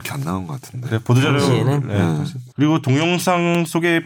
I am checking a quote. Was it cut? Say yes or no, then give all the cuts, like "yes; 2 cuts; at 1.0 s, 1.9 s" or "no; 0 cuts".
yes; 1 cut; at 2.5 s